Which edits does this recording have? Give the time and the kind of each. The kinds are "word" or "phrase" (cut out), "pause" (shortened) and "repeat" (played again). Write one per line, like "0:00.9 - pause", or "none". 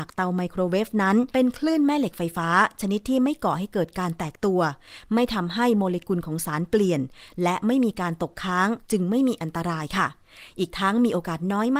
0:01.3 - pause
0:08.8 - pause